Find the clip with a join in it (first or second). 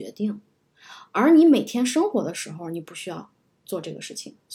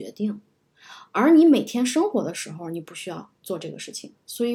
second